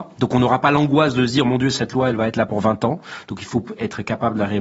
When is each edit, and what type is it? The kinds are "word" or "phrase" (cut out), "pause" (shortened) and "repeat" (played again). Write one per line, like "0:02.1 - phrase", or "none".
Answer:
none